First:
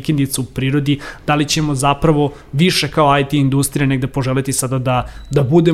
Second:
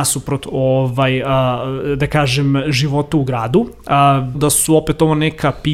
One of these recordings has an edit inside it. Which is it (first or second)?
second